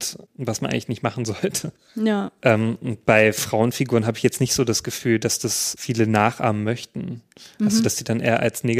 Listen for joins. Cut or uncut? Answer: uncut